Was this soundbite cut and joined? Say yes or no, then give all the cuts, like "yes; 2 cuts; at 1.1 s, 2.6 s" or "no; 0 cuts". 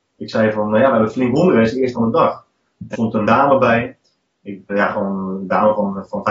yes; 4 cuts; at 1.9 s, 2.9 s, 3.2 s, 4.7 s